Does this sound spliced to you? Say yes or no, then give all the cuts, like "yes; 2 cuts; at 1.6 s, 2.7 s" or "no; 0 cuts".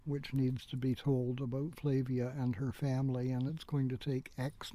no; 0 cuts